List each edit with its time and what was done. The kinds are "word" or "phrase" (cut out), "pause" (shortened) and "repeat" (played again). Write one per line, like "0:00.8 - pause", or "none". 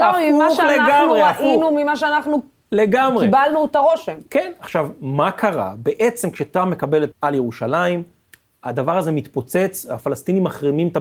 0:07.1 - word